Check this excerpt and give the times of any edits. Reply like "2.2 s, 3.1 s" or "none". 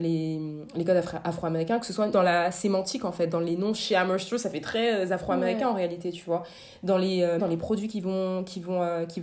2.1 s, 7.4 s